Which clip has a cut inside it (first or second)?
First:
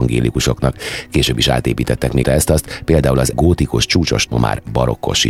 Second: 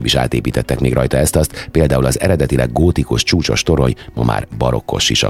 first